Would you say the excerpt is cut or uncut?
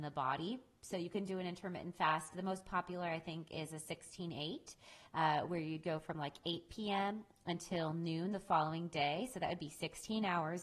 uncut